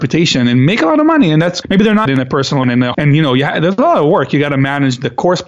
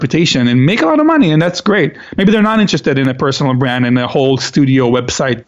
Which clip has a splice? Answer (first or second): first